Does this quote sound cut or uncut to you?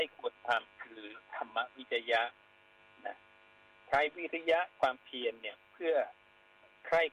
uncut